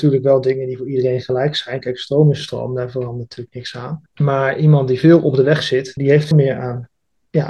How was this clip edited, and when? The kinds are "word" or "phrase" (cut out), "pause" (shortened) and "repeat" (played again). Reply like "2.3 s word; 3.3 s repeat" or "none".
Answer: 4.1 s pause; 6.0 s word; 6.3 s word